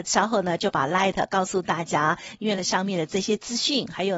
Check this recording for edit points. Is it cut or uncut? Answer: cut